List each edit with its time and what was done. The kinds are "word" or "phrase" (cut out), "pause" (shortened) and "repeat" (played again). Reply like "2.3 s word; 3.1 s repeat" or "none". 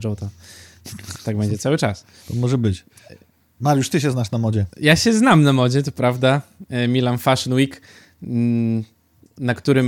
none